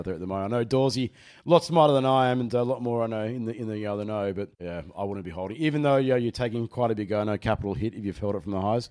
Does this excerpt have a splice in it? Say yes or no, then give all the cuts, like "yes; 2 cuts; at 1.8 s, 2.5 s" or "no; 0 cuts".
yes; 1 cut; at 4.5 s